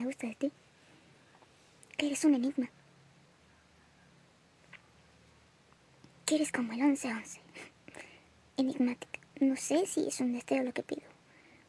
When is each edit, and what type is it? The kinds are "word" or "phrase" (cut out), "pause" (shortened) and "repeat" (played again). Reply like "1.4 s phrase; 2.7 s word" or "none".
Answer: 9.3 s pause